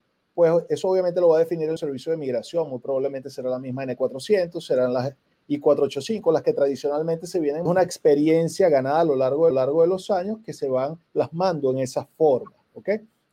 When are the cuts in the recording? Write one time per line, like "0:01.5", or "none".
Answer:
0:01.8
0:07.7
0:09.5
0:11.1